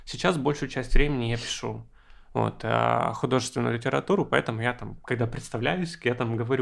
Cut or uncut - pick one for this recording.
uncut